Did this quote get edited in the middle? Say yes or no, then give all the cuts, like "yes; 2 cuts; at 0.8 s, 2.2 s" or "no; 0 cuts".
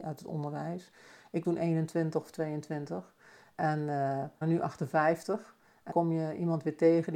yes; 3 cuts; at 1.4 s, 4.4 s, 5.9 s